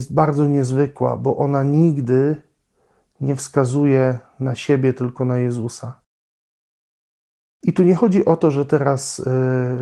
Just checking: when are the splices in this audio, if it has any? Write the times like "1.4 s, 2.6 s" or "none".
none